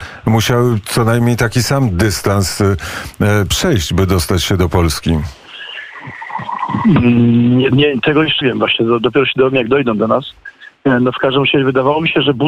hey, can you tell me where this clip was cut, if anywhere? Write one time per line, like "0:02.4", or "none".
0:07.7
0:08.4